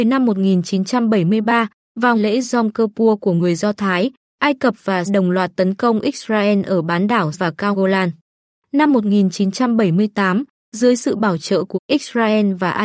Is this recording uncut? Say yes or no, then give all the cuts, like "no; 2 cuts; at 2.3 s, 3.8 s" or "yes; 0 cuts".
no; 5 cuts; at 2.1 s, 5.1 s, 7.3 s, 7.7 s, 11.7 s